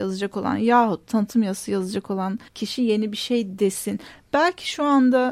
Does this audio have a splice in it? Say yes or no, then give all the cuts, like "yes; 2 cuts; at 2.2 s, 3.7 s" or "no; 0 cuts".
yes; 1 cut; at 2.5 s